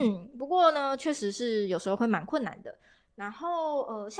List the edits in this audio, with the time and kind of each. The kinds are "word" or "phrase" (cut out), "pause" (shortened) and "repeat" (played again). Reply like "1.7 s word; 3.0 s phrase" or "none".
none